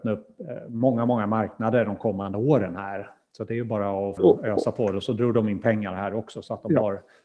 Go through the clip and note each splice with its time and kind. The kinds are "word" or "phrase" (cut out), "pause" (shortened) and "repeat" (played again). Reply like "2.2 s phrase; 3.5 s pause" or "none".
4.2 s word